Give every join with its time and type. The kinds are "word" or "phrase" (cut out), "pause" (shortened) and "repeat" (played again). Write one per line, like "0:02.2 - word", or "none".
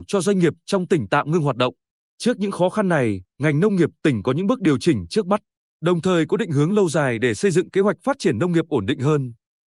none